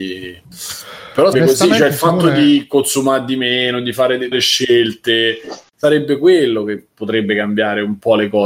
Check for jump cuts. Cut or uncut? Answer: cut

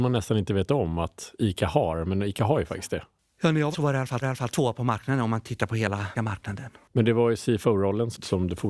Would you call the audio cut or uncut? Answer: cut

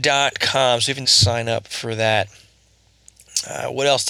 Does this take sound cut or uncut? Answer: cut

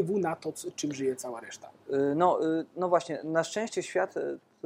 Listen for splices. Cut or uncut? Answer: uncut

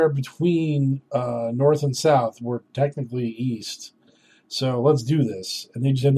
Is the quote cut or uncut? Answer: uncut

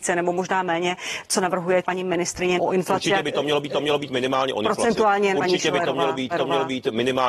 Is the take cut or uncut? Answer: cut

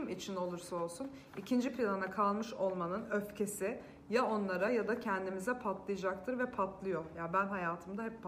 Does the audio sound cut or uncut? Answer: uncut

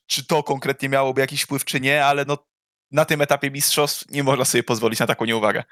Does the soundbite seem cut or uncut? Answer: uncut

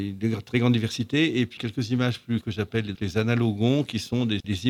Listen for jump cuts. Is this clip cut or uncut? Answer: cut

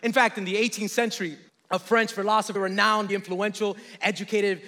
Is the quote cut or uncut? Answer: cut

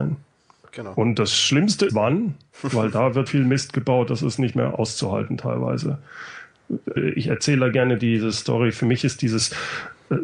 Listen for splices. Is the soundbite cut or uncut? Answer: cut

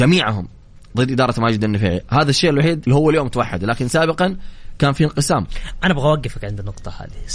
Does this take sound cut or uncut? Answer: cut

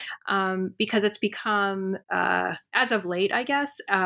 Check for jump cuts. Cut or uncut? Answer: cut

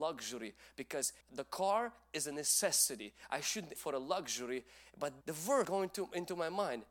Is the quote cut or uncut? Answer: cut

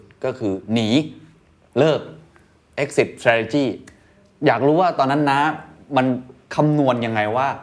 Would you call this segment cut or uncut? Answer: uncut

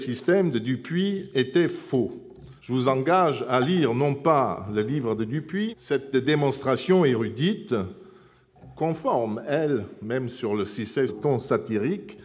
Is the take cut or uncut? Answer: cut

